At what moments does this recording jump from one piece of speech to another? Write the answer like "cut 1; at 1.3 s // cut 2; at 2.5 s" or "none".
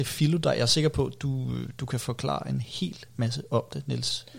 none